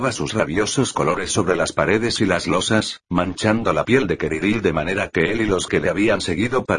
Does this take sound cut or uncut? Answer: uncut